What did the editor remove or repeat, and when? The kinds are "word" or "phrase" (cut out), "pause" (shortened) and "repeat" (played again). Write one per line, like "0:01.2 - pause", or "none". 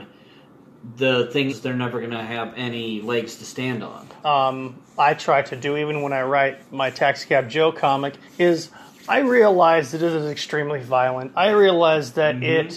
0:01.5 - word
0:04.2 - phrase
0:06.6 - pause
0:08.3 - pause